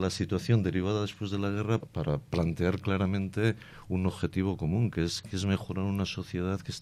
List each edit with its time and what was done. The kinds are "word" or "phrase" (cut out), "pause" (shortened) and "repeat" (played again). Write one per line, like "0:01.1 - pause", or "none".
0:01.8 - word